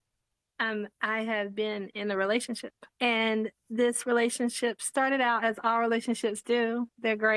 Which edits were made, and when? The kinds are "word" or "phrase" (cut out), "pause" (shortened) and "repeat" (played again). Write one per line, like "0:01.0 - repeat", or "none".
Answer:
0:02.9 - pause